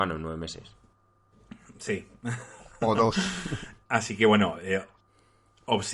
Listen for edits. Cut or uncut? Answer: uncut